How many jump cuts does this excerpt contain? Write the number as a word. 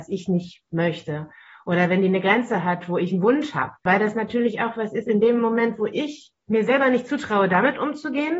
zero